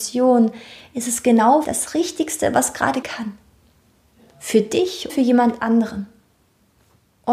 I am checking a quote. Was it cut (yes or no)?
yes